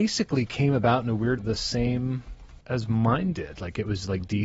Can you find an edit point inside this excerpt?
yes; 2 cuts; at 1.4 s, 2.6 s

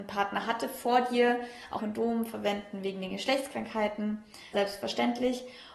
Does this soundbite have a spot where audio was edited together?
yes; 2 cuts; at 1.8 s, 4.5 s

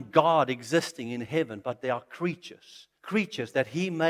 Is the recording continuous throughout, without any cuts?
no; 1 cut; at 3.0 s

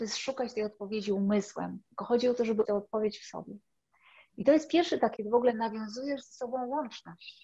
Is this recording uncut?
no; 2 cuts; at 2.6 s, 5.2 s

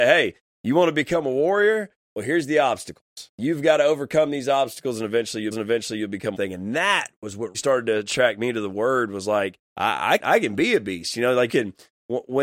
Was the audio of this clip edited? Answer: yes; 7 cuts; at 3.3 s, 5.5 s, 6.3 s, 7.5 s, 9.7 s, 10.2 s, 11.5 s

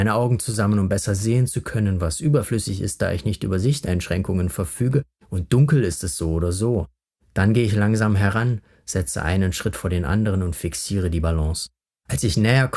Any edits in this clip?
no; 0 cuts

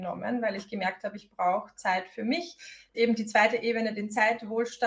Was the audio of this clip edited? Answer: yes; 1 cut; at 2.9 s

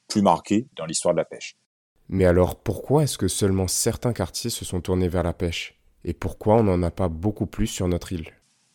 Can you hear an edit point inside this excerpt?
no; 0 cuts

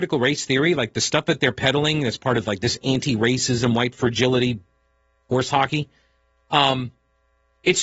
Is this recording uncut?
yes; 0 cuts

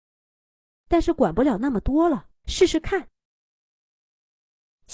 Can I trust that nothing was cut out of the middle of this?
no; 1 cut; at 2.4 s

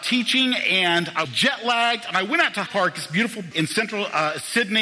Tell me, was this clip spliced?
yes; 3 cuts; at 1.2 s, 2.7 s, 3.5 s

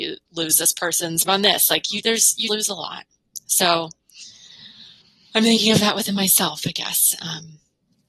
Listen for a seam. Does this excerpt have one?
yes; 3 cuts; at 1.3 s, 2.0 s, 2.5 s

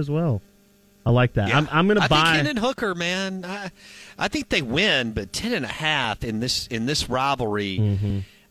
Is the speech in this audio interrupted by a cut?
no; 0 cuts

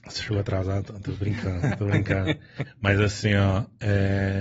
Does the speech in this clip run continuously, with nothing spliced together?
yes; 0 cuts

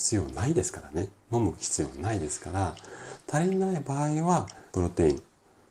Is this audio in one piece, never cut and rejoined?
no; 1 cut; at 4.7 s

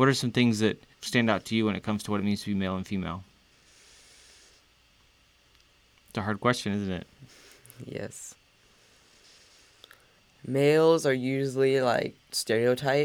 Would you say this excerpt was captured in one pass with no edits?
no; 1 cut; at 0.9 s

